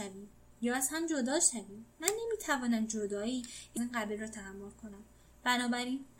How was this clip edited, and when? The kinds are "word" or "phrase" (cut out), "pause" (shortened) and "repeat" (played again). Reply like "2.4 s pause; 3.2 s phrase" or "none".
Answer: 3.8 s phrase